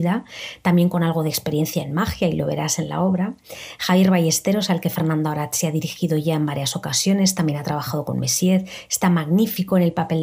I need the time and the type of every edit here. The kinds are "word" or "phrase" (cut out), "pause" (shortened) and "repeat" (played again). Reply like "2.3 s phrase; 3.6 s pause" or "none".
none